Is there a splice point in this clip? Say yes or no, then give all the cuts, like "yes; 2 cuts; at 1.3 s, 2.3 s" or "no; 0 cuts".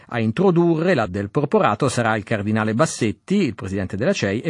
yes; 1 cut; at 1.0 s